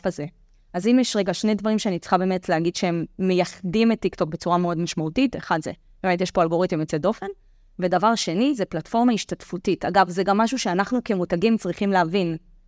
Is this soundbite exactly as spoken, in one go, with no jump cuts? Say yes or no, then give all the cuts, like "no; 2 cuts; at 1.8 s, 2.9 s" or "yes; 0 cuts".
yes; 0 cuts